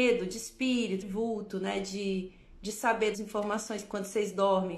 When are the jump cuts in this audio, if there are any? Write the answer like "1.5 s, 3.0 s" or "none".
1.0 s, 3.1 s